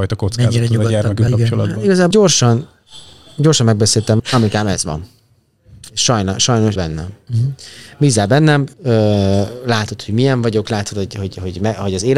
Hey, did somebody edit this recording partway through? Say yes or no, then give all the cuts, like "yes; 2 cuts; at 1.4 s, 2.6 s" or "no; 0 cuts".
yes; 5 cuts; at 1.3 s, 2.1 s, 4.2 s, 6.8 s, 8.7 s